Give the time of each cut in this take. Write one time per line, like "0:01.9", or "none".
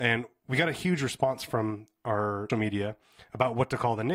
0:02.5